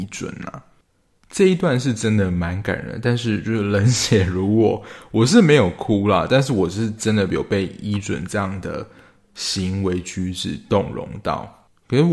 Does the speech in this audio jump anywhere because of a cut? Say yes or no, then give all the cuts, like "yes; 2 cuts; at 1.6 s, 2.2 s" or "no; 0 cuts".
no; 0 cuts